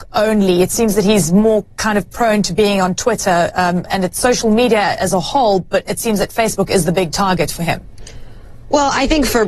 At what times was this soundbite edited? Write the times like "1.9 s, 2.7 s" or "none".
none